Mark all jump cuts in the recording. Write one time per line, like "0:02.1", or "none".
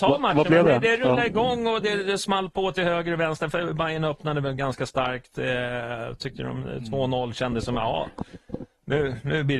none